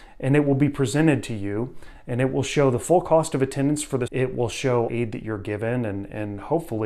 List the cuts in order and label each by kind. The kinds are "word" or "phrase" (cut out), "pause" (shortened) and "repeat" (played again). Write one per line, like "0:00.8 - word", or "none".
0:04.1 - word
0:04.9 - phrase

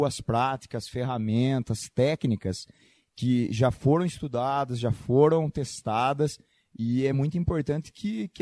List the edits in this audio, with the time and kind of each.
none

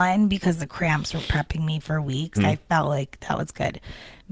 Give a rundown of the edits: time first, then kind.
0:02.4 - word

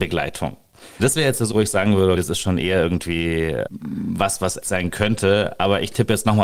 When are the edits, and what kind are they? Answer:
0:01.0 - word
0:01.5 - word
0:02.2 - word
0:03.7 - word
0:04.6 - word

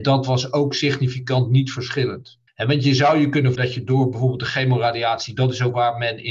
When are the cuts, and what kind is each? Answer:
0:02.5 - pause
0:03.6 - word

